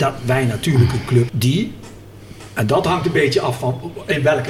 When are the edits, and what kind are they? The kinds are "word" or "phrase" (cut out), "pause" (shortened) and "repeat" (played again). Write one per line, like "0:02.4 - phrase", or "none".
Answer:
0:01.3 - word